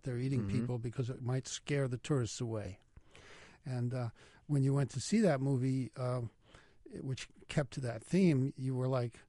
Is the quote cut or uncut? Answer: uncut